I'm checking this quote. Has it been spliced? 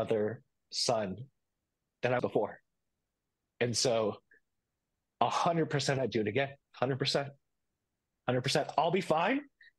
yes; 2 cuts; at 2.2 s, 6.6 s

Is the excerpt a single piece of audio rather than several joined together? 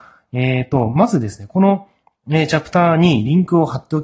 yes; 0 cuts

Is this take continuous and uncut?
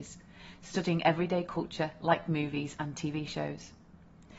yes; 0 cuts

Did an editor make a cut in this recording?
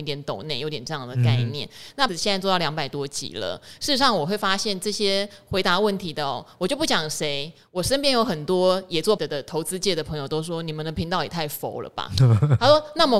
yes; 2 cuts; at 2.1 s, 9.2 s

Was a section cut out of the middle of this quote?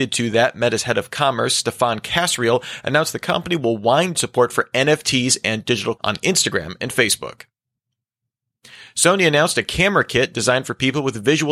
yes; 2 cuts; at 4.1 s, 6.0 s

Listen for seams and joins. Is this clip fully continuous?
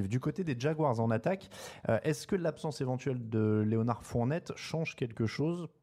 yes; 0 cuts

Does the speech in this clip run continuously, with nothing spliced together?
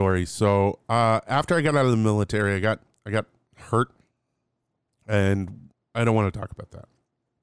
yes; 0 cuts

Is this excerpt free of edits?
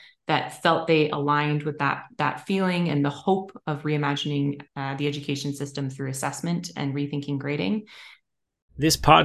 no; 1 cut; at 4.7 s

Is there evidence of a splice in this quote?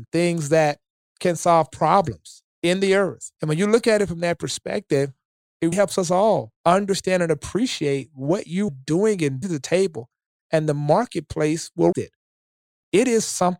yes; 6 cuts; at 3.4 s, 5.7 s, 6.6 s, 8.7 s, 9.4 s, 11.9 s

